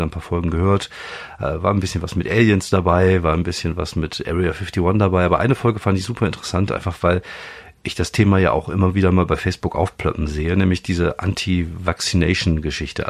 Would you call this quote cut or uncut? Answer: uncut